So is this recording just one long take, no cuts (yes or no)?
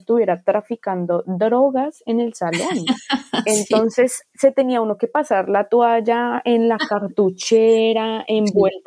yes